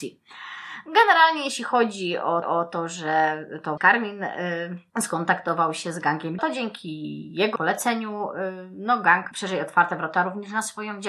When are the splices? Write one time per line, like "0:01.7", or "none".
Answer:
0:02.4
0:03.8
0:04.9
0:06.4
0:07.6
0:09.3